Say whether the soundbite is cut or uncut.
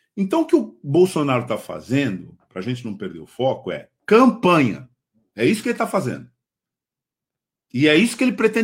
uncut